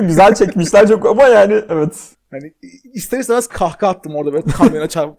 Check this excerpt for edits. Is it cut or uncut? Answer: cut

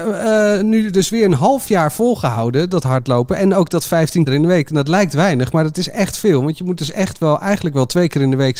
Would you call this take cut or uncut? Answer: cut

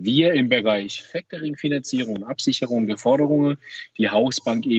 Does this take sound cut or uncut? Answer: uncut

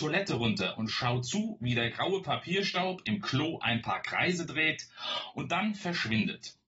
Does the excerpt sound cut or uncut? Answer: uncut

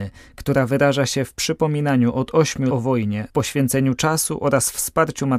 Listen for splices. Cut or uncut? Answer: cut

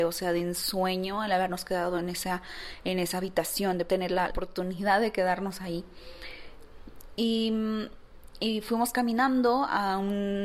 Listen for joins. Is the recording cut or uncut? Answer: cut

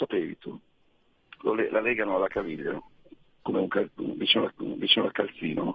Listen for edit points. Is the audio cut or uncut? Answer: cut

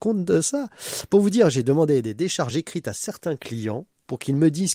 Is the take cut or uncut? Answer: uncut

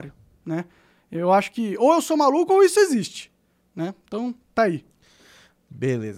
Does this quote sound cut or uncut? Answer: cut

